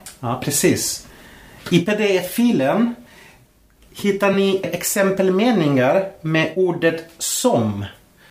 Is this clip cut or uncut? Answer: uncut